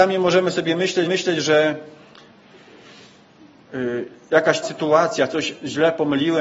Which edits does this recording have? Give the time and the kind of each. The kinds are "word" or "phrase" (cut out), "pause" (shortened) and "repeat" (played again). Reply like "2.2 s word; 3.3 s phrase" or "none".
1.1 s repeat; 4.6 s word